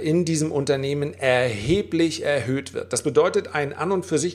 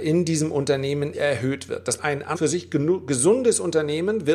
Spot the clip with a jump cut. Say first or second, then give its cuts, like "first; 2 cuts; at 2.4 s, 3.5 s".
second; 3 cuts; at 1.1 s, 2.0 s, 2.3 s